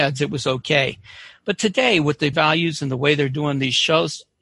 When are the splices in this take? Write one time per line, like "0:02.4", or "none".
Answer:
0:02.3